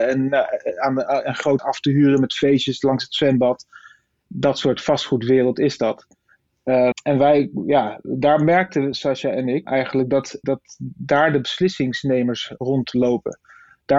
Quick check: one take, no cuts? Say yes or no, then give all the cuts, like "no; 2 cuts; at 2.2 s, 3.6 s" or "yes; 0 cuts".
no; 4 cuts; at 1.6 s, 6.9 s, 9.7 s, 10.4 s